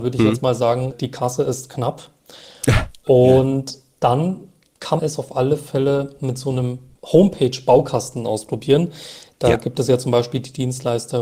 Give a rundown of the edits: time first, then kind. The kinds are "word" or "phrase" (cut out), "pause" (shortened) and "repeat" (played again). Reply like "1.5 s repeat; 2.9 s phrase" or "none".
5.0 s word